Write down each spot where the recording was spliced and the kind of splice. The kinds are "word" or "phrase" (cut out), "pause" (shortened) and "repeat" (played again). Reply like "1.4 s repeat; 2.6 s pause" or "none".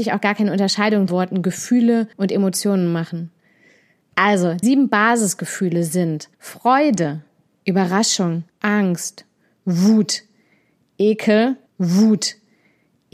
1.1 s phrase; 2.1 s pause; 4.6 s word; 6.3 s pause; 8.5 s pause; 11.7 s repeat

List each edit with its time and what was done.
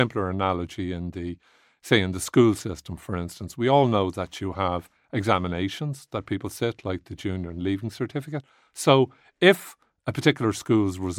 none

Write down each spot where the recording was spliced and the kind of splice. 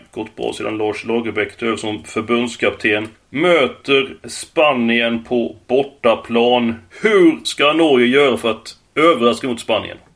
3.1 s pause; 6.9 s pause; 8.8 s pause

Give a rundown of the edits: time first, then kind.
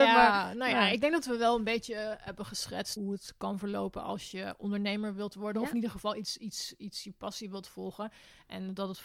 3.0 s word

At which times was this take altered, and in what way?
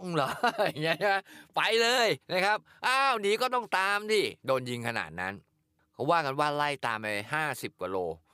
2.2 s pause; 4.4 s pause

